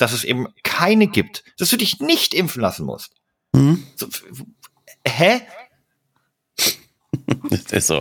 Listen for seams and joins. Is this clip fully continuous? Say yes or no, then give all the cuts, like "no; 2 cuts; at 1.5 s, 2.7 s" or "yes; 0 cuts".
yes; 0 cuts